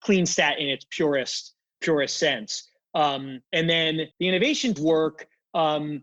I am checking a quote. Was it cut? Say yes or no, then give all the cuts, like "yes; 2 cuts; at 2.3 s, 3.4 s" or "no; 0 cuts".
yes; 4 cuts; at 1.8 s, 3.4 s, 4.1 s, 4.8 s